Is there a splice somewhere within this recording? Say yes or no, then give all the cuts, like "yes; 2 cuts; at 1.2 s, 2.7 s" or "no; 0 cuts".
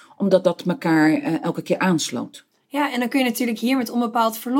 no; 0 cuts